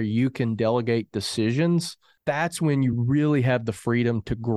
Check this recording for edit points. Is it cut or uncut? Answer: uncut